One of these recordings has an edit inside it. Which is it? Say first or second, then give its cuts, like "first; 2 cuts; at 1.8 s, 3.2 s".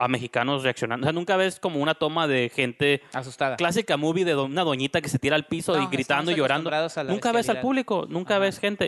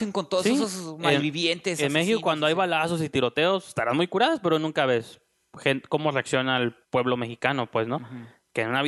second; 1 cut; at 6.8 s